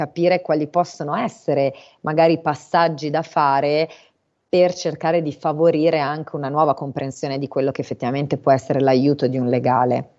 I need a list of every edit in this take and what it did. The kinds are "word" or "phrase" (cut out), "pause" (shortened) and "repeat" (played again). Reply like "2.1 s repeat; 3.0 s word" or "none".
none